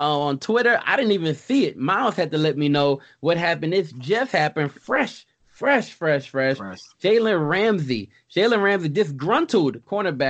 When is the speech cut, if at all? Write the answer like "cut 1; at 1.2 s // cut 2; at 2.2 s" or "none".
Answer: none